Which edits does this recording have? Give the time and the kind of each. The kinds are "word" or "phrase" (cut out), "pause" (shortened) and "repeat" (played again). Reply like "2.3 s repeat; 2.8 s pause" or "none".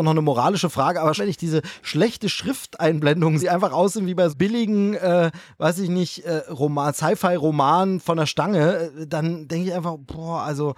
1.2 s word; 3.4 s word; 4.3 s phrase